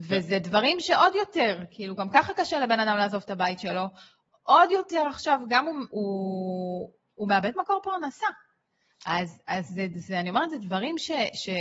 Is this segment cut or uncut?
cut